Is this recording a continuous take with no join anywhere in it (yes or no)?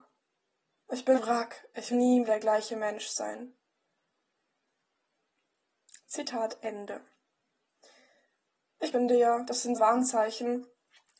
no